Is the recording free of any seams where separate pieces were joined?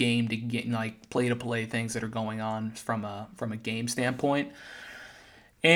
yes; 0 cuts

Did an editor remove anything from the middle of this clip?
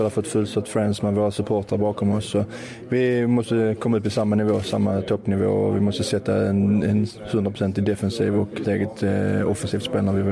yes; 1 cut; at 8.6 s

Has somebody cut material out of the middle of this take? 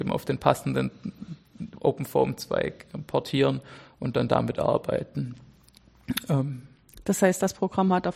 no; 0 cuts

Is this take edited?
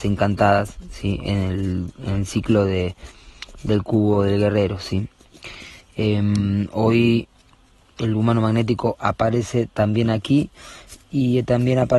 no; 0 cuts

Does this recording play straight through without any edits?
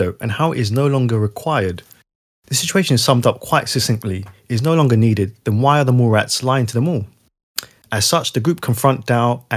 yes; 0 cuts

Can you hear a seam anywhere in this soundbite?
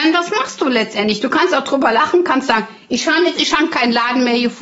yes; 1 cut; at 3.3 s

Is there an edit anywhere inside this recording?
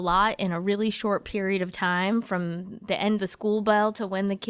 yes; 1 cut; at 3.2 s

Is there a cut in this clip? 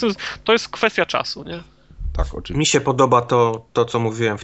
no; 0 cuts

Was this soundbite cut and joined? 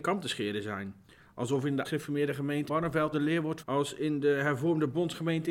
yes; 4 cuts; at 1.8 s, 2.7 s, 3.1 s, 3.6 s

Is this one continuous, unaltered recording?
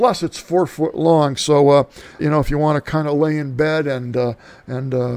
no; 1 cut; at 2.2 s

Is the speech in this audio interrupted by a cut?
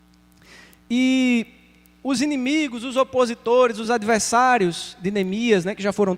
no; 0 cuts

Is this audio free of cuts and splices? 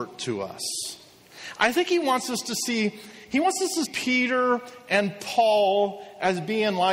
no; 1 cut; at 3.8 s

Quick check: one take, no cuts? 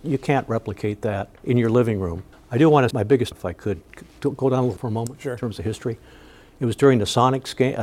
no; 5 cuts; at 1.4 s, 2.3 s, 2.9 s, 3.3 s, 4.8 s

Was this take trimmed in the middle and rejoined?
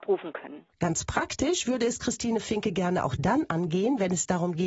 no; 0 cuts

